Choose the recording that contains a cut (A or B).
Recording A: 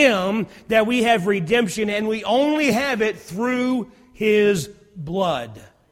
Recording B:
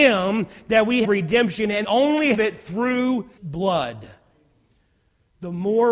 B